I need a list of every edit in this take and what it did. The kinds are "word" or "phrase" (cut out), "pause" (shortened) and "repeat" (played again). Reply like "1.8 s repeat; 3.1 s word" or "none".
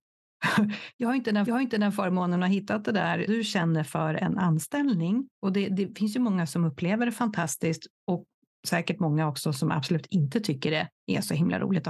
1.5 s repeat; 3.3 s word; 5.3 s pause; 8.0 s pause